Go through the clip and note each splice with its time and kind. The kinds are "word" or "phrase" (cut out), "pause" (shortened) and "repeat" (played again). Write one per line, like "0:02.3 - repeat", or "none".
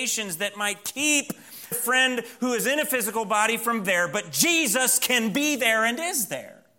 0:01.7 - word
0:03.8 - word